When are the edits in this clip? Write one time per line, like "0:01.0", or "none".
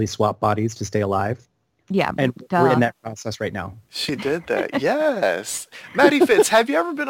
none